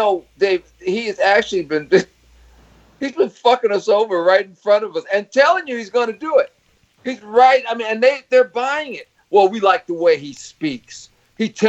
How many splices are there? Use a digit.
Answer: 0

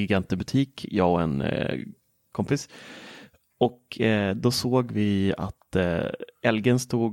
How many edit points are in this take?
0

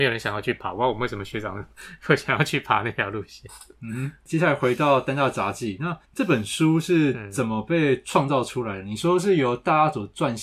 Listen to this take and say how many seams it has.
1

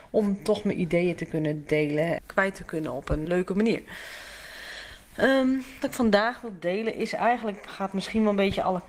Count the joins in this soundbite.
4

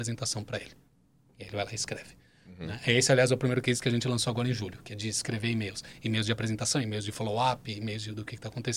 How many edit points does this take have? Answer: 0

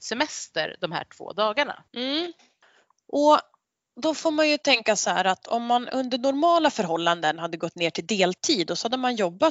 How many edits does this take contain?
1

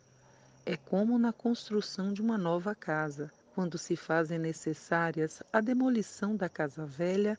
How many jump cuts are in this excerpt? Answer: 1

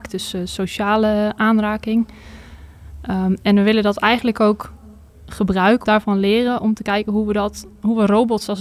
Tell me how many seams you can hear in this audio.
1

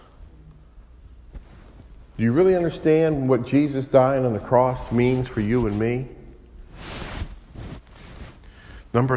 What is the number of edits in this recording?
0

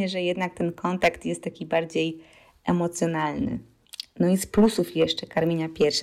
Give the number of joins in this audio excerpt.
0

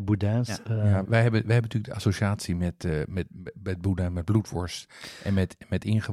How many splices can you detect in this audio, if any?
1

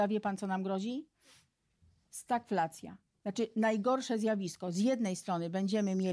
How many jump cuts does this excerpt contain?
0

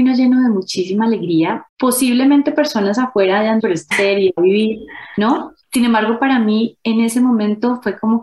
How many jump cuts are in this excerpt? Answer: 5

